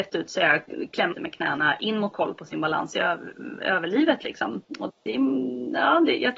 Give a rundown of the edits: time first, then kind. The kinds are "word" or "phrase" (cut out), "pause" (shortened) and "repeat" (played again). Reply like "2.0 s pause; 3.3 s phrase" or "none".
1.1 s word; 2.1 s phrase; 4.9 s word